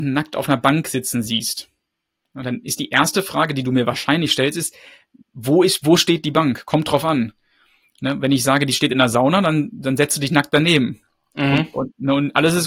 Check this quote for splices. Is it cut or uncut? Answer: uncut